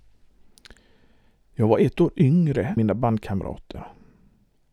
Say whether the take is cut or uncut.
cut